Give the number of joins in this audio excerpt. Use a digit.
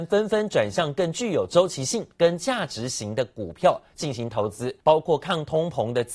2